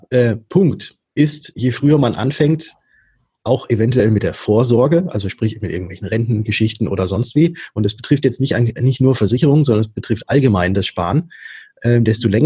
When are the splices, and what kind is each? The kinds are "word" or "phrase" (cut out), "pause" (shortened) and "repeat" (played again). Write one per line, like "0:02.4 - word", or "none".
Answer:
0:01.0 - pause